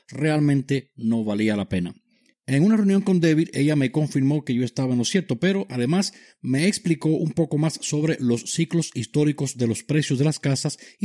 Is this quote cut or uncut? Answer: uncut